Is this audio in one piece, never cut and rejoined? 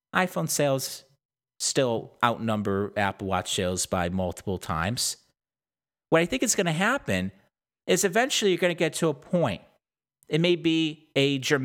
yes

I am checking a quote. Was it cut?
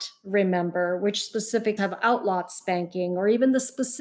yes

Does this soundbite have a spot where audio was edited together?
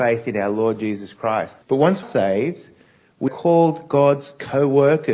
yes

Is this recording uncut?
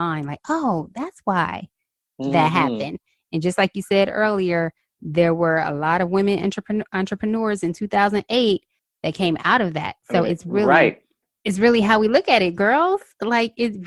yes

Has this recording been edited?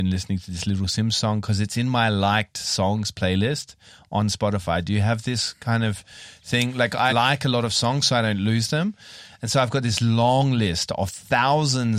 yes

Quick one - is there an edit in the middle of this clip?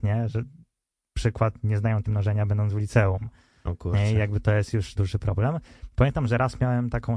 yes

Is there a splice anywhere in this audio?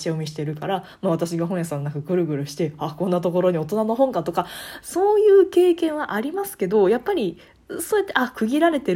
no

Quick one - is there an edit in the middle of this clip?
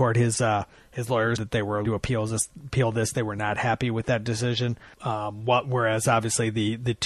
yes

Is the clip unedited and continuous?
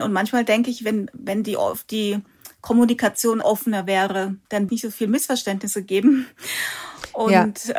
no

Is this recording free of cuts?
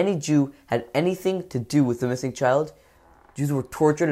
yes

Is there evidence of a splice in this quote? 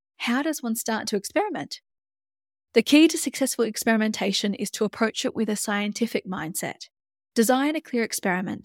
no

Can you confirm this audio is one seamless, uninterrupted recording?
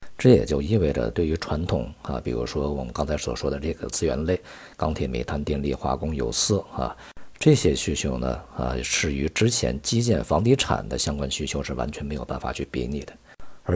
yes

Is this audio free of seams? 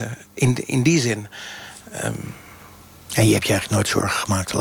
yes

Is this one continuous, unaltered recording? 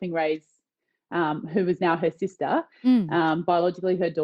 yes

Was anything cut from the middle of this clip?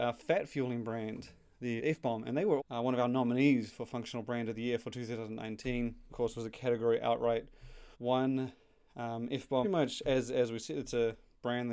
yes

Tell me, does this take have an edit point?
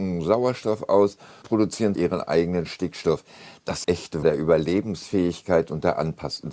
yes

